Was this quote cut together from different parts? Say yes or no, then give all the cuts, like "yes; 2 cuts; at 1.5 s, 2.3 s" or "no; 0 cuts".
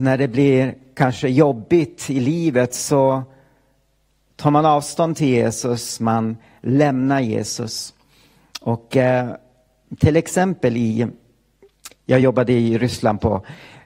no; 0 cuts